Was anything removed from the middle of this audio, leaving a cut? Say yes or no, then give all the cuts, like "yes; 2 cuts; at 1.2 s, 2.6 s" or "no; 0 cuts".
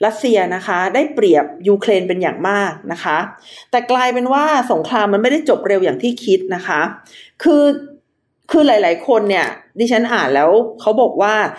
no; 0 cuts